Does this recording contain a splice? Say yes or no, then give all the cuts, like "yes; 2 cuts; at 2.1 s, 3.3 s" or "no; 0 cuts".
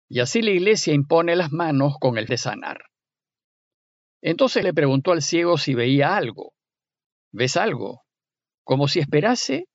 yes; 2 cuts; at 2.3 s, 4.6 s